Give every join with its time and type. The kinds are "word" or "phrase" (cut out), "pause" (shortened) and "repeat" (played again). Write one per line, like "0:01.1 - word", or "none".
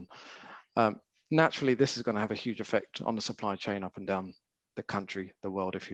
none